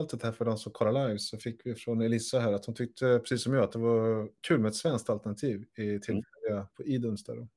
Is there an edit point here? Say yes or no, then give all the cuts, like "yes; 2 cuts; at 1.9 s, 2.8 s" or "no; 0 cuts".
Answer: no; 0 cuts